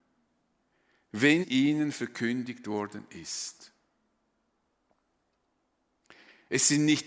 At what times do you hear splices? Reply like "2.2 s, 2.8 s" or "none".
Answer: 1.4 s